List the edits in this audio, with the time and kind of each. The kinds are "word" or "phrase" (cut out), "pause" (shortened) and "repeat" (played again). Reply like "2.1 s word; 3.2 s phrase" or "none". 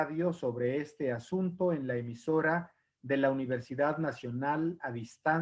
none